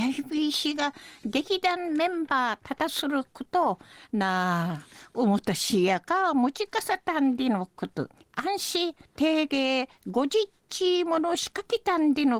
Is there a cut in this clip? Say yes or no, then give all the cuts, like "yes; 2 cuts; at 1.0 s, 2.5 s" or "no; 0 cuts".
yes; 2 cuts; at 8.1 s, 9.0 s